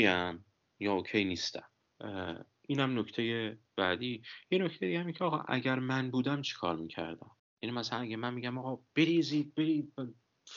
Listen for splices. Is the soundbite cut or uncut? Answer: cut